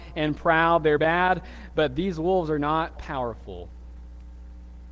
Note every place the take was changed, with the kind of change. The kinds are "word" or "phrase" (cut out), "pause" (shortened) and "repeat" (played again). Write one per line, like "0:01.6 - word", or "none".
0:01.0 - phrase
0:03.0 - word